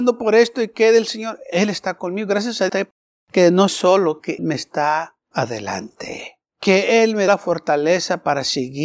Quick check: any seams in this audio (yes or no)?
yes